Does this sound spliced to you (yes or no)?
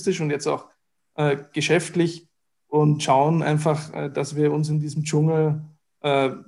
no